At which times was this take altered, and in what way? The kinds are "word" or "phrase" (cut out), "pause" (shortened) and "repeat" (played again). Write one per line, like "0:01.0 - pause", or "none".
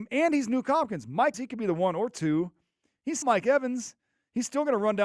0:01.3 - word
0:03.2 - word